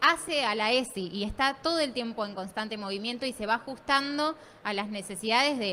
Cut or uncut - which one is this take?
uncut